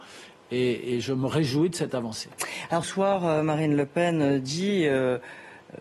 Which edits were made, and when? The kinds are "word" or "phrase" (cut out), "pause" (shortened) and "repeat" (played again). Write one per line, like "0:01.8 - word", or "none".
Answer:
0:02.8 - word